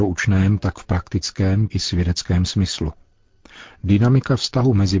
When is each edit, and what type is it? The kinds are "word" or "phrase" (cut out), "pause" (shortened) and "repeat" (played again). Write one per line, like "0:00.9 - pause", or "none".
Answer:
0:01.7 - word